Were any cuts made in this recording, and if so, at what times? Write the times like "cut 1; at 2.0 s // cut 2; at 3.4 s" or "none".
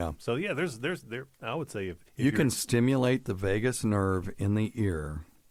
cut 1; at 1.0 s // cut 2; at 2.1 s